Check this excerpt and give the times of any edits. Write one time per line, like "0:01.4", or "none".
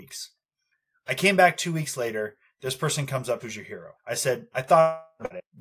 0:03.4
0:04.0

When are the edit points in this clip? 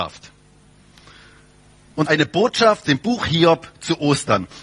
0:02.1
0:02.8

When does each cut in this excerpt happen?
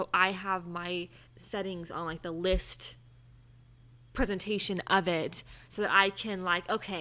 0:01.3

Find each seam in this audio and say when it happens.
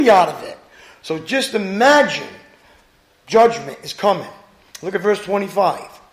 none

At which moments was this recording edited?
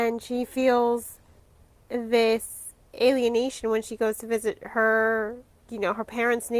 none

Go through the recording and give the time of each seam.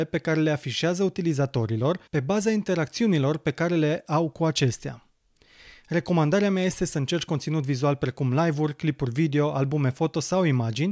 0:02.1

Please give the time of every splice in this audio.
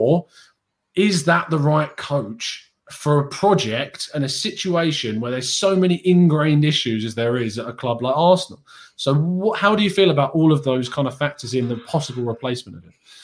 none

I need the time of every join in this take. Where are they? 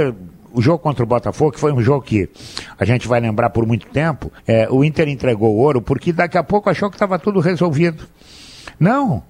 0:04.4

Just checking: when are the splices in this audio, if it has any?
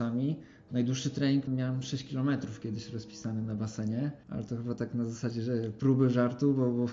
0:01.5
0:04.2

